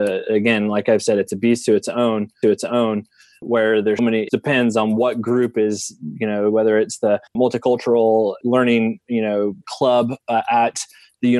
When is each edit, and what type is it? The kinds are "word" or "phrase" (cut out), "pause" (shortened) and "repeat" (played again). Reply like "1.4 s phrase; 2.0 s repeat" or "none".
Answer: 2.4 s repeat; 4.0 s word; 4.3 s word; 7.3 s pause; 9.6 s pause